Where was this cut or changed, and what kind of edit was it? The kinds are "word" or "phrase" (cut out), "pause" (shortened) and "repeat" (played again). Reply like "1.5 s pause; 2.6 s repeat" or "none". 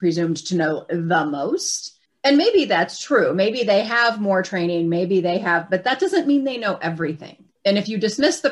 2.1 s pause; 7.6 s pause